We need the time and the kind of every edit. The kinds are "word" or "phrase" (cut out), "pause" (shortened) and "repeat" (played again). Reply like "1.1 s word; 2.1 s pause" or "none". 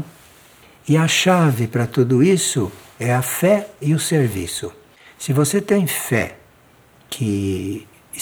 none